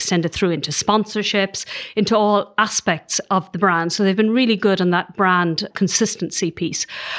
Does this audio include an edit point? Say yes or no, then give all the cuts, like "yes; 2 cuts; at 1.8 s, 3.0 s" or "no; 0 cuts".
no; 0 cuts